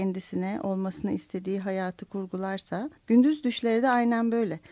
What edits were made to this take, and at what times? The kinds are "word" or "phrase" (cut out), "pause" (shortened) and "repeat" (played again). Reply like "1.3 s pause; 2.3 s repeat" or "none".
3.0 s pause